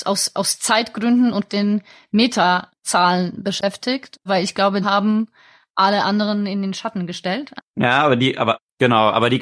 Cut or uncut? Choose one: cut